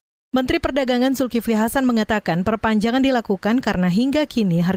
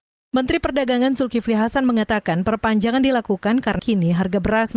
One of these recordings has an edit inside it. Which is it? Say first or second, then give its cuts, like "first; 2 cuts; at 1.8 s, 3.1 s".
second; 1 cut; at 3.8 s